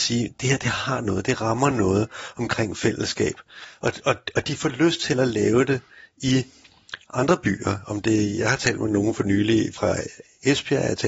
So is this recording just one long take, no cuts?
yes; 0 cuts

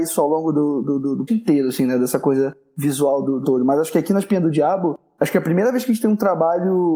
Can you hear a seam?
yes; 2 cuts; at 1.3 s, 3.4 s

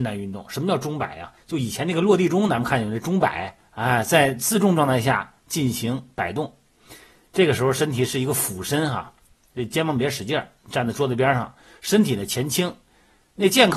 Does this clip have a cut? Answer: no; 0 cuts

